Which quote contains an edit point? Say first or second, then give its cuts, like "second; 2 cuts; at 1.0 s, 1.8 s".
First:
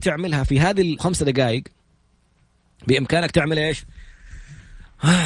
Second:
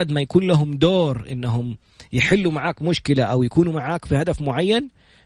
first; 1 cut; at 1.0 s